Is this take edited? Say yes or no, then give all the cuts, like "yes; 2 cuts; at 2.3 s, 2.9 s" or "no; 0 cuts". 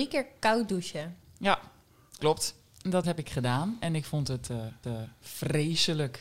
yes; 3 cuts; at 2.2 s, 3.0 s, 4.8 s